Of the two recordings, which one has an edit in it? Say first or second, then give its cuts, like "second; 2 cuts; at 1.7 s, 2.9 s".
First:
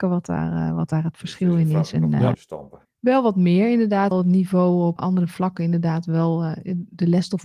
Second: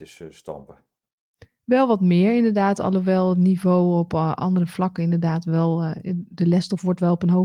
first; 4 cuts; at 2.3 s, 2.8 s, 4.1 s, 5.0 s